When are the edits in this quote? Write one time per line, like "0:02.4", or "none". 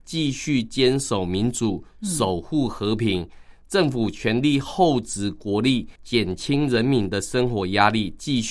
0:06.0